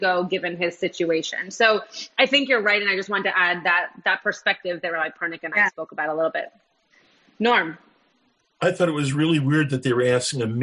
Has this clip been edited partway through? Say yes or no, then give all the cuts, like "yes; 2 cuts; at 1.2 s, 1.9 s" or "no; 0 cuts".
no; 0 cuts